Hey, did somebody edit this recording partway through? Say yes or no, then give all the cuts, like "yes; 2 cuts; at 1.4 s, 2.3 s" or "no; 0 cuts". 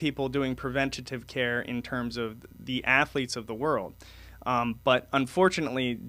no; 0 cuts